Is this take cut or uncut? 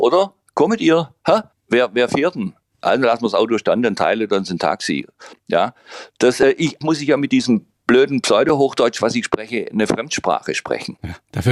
cut